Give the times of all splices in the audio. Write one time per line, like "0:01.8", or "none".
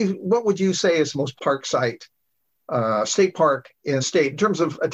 0:01.4
0:04.0

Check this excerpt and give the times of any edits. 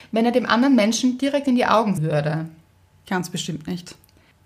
0:02.0

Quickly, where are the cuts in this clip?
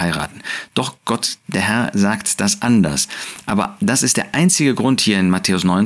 none

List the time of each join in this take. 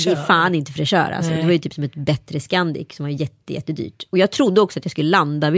none

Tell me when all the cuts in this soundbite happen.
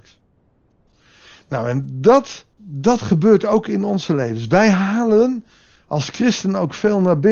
0:02.5

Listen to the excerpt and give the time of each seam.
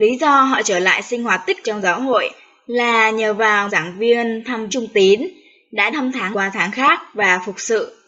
0:01.6
0:03.7
0:04.7
0:05.9
0:06.3

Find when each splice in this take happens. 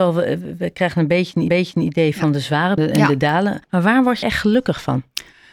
0:01.5
0:02.8
0:03.6
0:04.2

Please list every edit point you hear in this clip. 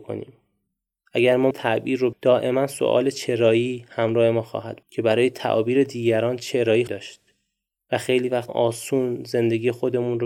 0:01.5
0:02.1
0:04.8
0:06.9
0:08.5

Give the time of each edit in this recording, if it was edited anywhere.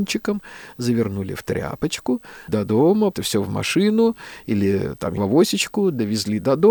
0:02.5
0:03.1
0:05.2

